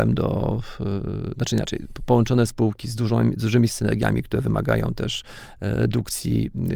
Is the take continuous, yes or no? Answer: no